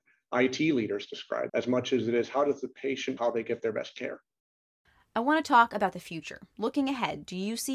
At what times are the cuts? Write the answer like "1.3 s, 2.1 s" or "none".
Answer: 1.5 s, 3.2 s